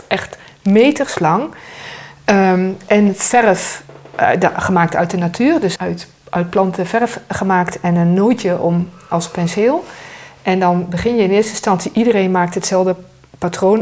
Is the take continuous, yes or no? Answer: no